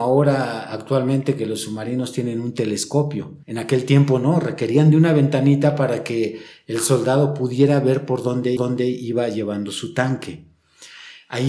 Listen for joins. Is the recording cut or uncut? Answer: cut